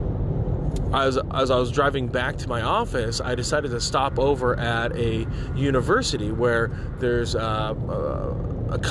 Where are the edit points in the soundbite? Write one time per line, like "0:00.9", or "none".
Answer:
none